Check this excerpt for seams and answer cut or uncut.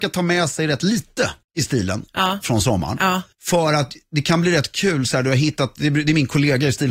cut